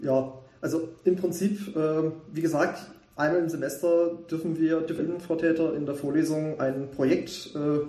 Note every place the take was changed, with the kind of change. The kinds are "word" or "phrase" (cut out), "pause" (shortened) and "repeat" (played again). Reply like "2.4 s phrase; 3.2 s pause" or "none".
5.0 s phrase